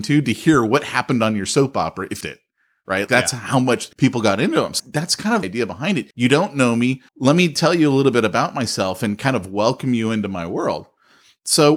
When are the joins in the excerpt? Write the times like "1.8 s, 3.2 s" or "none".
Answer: 2.2 s, 3.1 s, 3.9 s, 4.8 s, 5.4 s, 6.1 s, 7.1 s